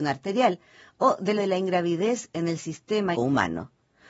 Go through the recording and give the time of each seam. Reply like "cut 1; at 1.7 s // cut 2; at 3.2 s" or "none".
cut 1; at 1.4 s // cut 2; at 3.1 s